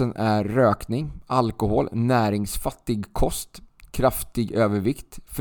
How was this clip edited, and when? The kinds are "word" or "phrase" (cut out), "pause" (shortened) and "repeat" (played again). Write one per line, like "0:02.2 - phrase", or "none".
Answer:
none